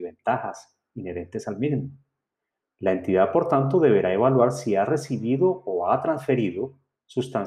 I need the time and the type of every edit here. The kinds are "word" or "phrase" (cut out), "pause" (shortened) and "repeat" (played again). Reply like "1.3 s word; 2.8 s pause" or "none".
none